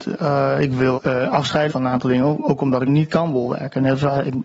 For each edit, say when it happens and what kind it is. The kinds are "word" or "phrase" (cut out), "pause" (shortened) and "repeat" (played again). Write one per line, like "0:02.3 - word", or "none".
0:00.9 - word
0:01.7 - word
0:02.4 - word
0:02.9 - word

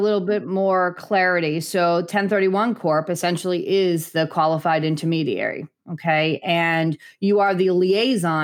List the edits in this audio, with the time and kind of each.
none

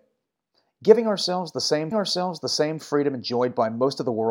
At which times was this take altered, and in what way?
0:01.9 - repeat

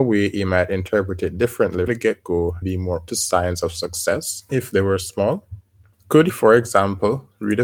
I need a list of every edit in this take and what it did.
0:01.9 - word
0:02.6 - word
0:03.1 - word
0:04.5 - word
0:06.3 - word

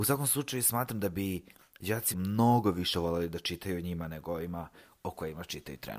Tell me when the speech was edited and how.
0:02.1 - word

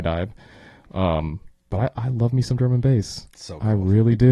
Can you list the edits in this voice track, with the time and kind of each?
none

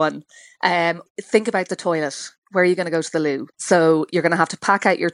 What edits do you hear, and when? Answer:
0:01.1 - word
0:03.5 - pause

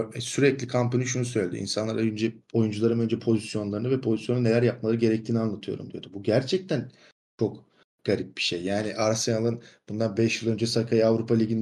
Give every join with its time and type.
none

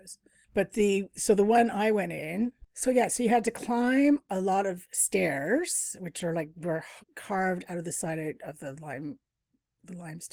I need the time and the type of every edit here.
0:07.0 - pause

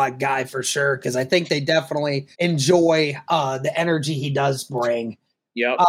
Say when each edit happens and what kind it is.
0:02.3 - pause

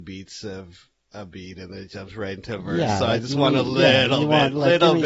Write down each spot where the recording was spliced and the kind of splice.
none

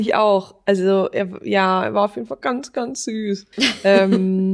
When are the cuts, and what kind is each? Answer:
0:03.5 - pause

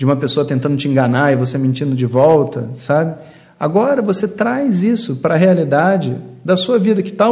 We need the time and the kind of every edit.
none

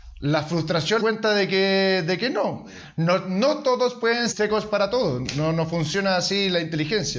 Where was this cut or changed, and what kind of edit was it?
0:01.0 - phrase
0:04.3 - word

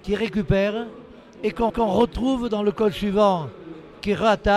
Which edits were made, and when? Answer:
0:01.7 - repeat

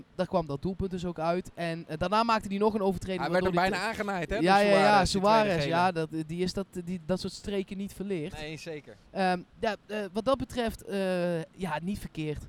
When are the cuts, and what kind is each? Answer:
0:09.1 - pause

